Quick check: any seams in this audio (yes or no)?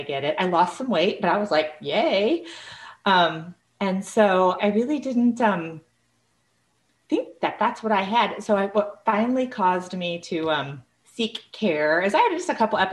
yes